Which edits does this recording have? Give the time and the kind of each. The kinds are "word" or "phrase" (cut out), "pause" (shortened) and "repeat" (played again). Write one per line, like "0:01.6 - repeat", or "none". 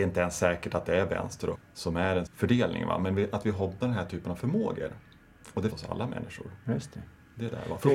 0:01.5 - word
0:02.3 - word
0:03.8 - word
0:05.7 - word